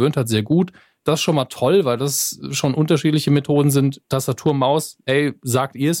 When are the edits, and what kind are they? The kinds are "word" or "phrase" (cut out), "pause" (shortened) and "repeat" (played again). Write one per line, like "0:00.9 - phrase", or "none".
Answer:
none